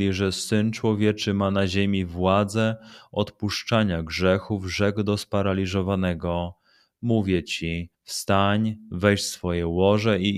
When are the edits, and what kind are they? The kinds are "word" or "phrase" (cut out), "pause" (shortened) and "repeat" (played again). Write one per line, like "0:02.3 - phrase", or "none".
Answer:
0:07.9 - pause